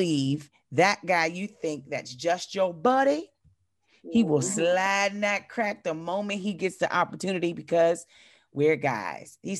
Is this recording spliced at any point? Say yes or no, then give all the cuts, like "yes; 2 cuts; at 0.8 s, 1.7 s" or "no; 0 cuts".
no; 0 cuts